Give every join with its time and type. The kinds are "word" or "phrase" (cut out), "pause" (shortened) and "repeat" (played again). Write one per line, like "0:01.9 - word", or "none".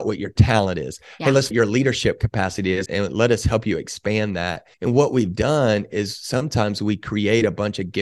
0:01.5 - phrase
0:02.9 - word
0:04.7 - pause